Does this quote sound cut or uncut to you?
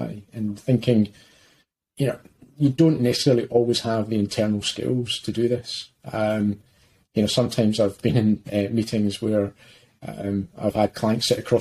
uncut